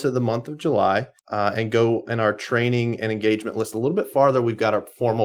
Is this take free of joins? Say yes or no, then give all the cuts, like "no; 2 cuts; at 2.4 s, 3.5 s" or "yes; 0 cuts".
no; 1 cut; at 1.2 s